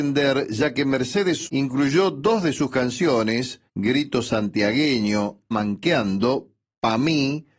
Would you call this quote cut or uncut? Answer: cut